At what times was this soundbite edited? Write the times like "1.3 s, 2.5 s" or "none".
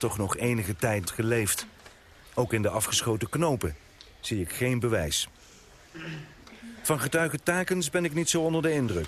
1.1 s, 2.2 s